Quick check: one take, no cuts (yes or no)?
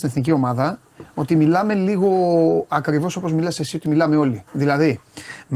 yes